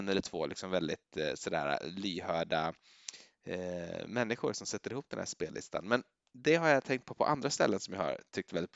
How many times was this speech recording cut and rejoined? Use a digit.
0